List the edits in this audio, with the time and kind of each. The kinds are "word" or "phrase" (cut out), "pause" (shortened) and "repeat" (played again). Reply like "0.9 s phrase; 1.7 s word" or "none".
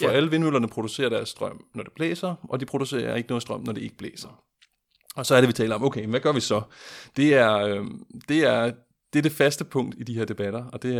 none